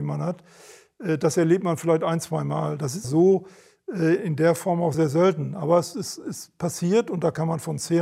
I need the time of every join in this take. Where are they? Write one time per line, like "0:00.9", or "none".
0:03.0
0:04.9
0:05.9